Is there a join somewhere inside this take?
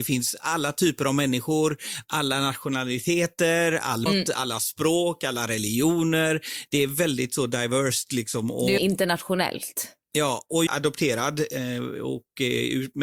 yes; 3 cuts; at 4.1 s, 8.8 s, 10.7 s

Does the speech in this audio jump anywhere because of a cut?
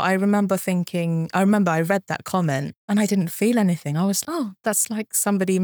yes; 2 cuts; at 2.8 s, 4.2 s

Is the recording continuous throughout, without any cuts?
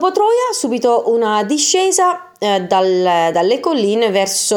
yes; 0 cuts

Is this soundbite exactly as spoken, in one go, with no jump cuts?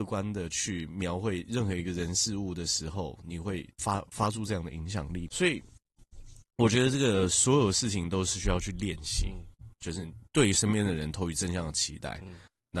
no; 3 cuts; at 3.7 s, 5.3 s, 10.3 s

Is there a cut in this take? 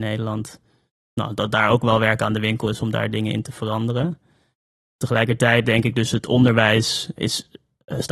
no; 0 cuts

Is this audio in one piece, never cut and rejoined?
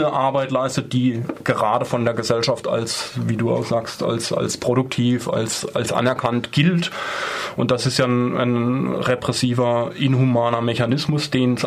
yes; 0 cuts

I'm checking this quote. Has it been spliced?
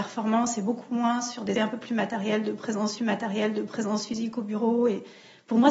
yes; 2 cuts; at 1.5 s, 3.0 s

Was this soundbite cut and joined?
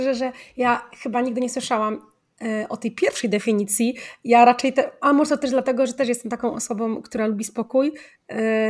no; 0 cuts

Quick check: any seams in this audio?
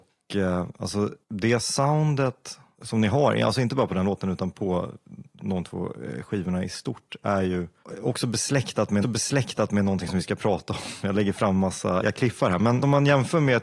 yes; 3 cuts; at 1.2 s, 9.0 s, 12.0 s

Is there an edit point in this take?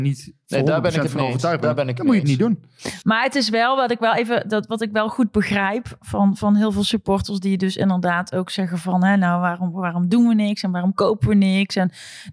no; 0 cuts

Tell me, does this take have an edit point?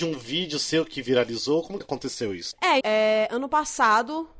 yes; 2 cuts; at 1.8 s, 2.8 s

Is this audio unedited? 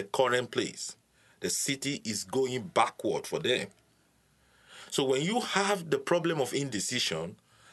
yes; 0 cuts

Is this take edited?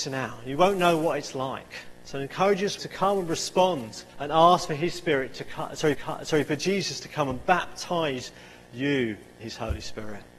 yes; 4 cuts; at 2.8 s, 4.1 s, 5.9 s, 9.4 s

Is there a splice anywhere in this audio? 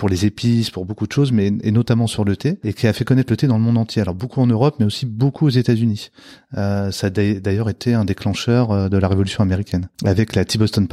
no; 0 cuts

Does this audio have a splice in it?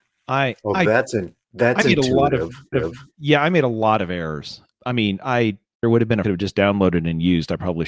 yes; 5 cuts; at 1.4 s, 2.7 s, 4.7 s, 5.8 s, 6.2 s

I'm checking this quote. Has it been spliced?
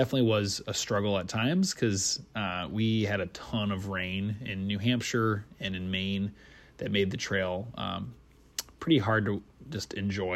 no; 0 cuts

